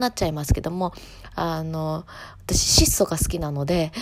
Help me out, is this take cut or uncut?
uncut